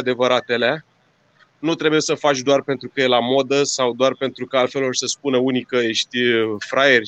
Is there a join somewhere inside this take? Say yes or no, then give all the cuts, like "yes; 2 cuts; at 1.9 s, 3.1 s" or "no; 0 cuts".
no; 0 cuts